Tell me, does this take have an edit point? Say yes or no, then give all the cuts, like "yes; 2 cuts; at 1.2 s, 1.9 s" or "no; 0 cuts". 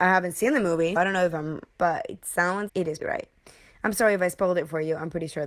yes; 4 cuts; at 1.0 s, 1.7 s, 2.7 s, 3.0 s